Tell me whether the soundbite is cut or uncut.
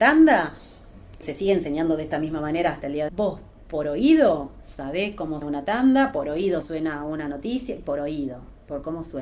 cut